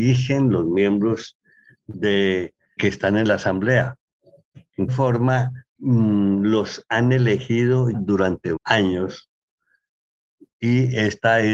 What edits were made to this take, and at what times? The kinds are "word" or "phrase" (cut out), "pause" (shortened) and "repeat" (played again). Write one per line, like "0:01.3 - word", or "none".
0:02.8 - word
0:04.9 - word
0:05.8 - word
0:07.9 - word
0:08.6 - word